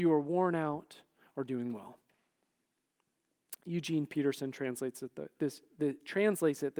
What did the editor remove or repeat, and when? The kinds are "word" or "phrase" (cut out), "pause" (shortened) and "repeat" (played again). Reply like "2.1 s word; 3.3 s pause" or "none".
none